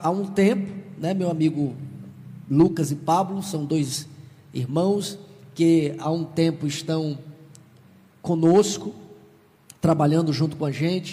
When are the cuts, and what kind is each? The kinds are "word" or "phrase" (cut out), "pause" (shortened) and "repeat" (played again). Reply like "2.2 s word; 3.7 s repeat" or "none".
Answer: 6.0 s word